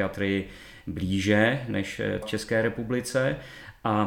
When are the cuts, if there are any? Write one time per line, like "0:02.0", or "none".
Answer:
0:02.2